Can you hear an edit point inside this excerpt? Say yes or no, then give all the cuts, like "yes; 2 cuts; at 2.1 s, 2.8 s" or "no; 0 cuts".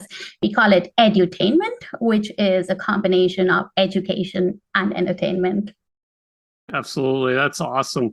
no; 0 cuts